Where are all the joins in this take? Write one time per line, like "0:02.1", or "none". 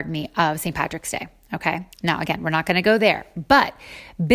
0:01.9